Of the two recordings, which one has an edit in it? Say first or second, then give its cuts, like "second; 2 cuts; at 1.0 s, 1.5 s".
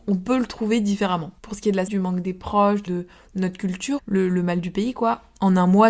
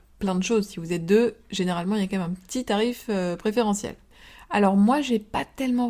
first; 4 cuts; at 1.4 s, 1.9 s, 2.9 s, 4.0 s